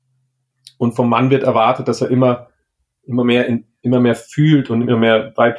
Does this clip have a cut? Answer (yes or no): no